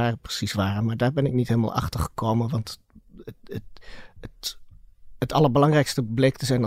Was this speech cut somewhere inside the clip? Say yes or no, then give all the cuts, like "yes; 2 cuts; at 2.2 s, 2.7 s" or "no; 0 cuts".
no; 0 cuts